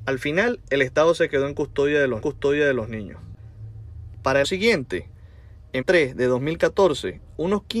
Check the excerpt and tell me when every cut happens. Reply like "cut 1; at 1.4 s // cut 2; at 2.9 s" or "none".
cut 1; at 2.2 s // cut 2; at 4.4 s // cut 3; at 5.8 s